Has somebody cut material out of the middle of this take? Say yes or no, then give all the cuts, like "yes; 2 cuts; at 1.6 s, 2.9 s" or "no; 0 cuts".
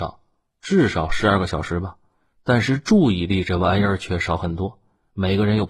no; 0 cuts